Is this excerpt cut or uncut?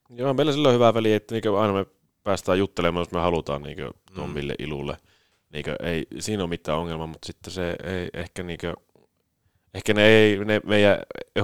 uncut